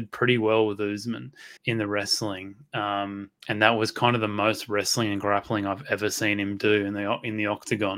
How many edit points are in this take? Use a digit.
2